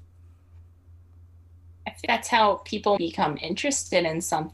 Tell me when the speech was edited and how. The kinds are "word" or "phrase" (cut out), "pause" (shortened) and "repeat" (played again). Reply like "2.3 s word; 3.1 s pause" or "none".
2.1 s word; 3.0 s word